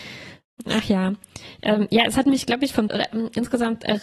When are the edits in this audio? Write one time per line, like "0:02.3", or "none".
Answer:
0:02.9